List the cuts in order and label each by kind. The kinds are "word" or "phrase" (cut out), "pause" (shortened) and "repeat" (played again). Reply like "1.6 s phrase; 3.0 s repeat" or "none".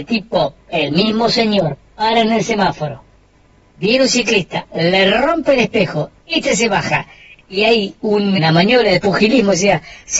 8.0 s word; 8.4 s word